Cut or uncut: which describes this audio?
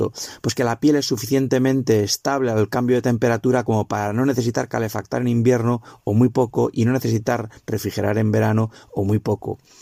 uncut